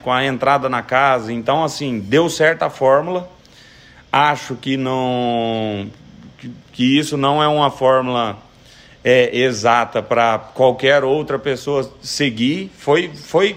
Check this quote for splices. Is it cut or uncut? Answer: uncut